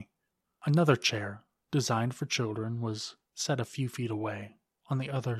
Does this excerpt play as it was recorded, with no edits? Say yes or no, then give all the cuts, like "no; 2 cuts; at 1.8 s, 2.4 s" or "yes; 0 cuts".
yes; 0 cuts